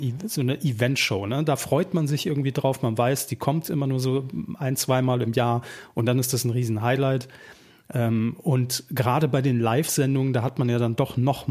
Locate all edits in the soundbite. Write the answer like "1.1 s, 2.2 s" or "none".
none